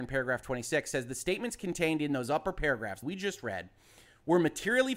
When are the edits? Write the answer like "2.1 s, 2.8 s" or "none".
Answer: 3.0 s